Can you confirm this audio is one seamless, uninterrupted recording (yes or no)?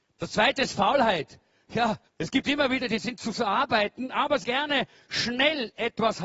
no